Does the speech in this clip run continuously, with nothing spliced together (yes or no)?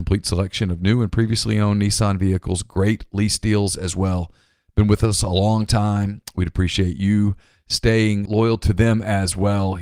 no